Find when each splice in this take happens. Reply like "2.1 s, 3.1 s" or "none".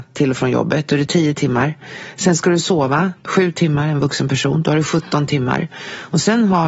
3.2 s